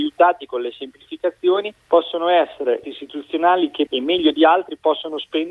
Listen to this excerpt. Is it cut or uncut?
cut